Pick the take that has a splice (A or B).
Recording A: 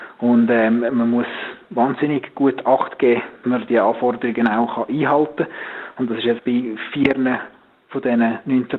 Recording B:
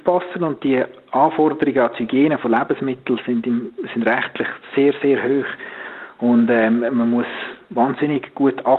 A